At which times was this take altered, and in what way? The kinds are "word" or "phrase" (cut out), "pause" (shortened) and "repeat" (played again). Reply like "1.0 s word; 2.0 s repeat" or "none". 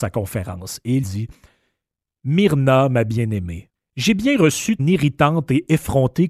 1.0 s word; 3.7 s pause; 4.8 s word